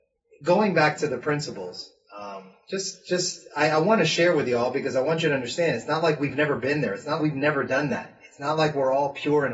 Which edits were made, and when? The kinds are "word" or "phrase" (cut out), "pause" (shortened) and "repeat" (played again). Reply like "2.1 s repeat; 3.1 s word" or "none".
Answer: 7.2 s word